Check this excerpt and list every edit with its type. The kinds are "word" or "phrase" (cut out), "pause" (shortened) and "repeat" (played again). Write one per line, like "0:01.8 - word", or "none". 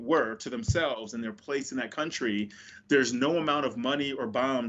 none